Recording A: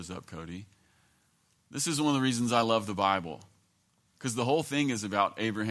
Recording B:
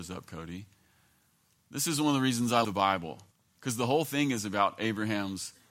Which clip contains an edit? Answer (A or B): B